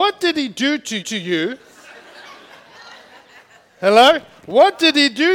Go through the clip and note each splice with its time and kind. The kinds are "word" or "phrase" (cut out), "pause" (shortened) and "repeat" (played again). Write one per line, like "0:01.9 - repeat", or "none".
0:01.0 - repeat